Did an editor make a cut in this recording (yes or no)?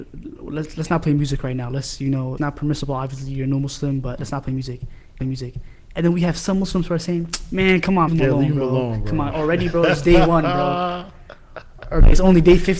yes